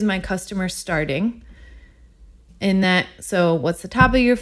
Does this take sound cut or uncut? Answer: uncut